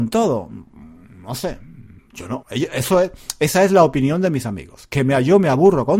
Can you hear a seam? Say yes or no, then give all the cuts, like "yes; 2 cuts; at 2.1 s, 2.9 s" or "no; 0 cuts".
yes; 1 cut; at 2.4 s